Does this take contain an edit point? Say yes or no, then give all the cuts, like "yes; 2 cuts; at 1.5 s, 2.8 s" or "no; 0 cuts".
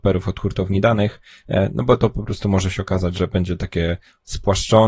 no; 0 cuts